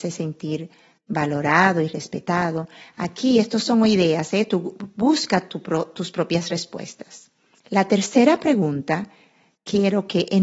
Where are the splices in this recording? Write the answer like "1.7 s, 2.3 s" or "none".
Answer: none